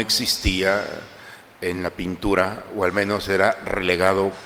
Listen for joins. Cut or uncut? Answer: uncut